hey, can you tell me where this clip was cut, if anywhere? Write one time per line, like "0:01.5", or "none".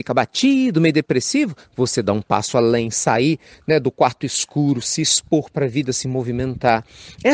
none